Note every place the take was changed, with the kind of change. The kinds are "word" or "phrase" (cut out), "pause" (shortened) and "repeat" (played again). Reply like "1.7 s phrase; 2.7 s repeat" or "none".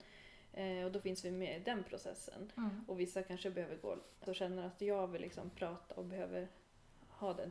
4.3 s word